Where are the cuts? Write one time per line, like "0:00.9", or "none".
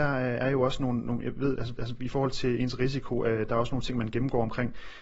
0:01.8

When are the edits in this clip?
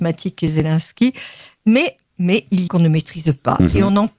0:02.1
0:02.7

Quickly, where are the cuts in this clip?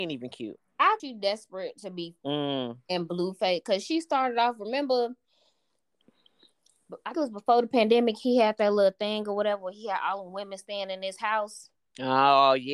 0:01.0
0:02.2
0:07.1

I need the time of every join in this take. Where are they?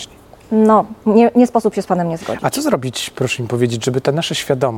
0:01.0

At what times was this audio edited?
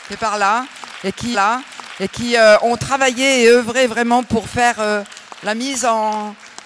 0:01.3

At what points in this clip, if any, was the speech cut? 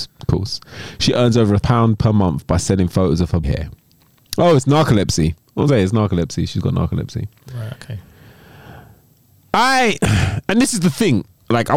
0:01.6
0:03.4
0:05.7

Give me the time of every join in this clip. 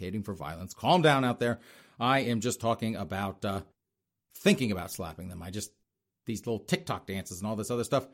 none

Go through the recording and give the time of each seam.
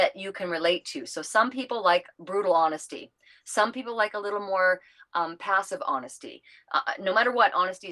none

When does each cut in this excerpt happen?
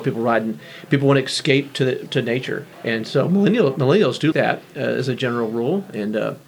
0:02.7
0:04.3

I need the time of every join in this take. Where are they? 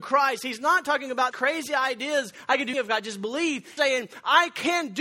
0:01.3
0:02.7
0:03.8

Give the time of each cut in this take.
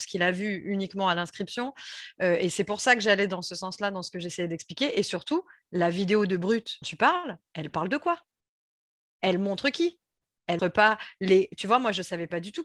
0:06.8
0:10.6

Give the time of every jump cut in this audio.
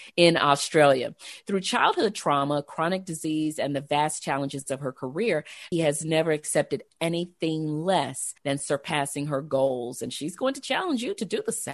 0:05.7
0:08.4

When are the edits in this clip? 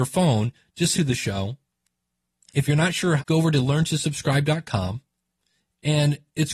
0:00.9
0:03.2

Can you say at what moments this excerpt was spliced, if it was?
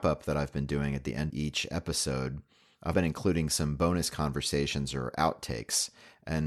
0:01.3
0:02.9

